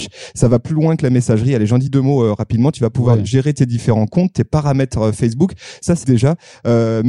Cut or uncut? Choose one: cut